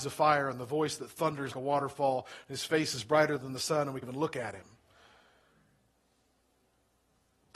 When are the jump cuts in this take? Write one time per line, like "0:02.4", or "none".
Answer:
0:01.5
0:04.0